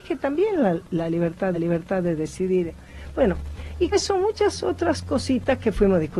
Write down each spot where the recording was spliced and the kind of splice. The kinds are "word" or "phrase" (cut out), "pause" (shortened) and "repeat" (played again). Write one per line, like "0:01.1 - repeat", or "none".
0:01.5 - repeat
0:03.9 - word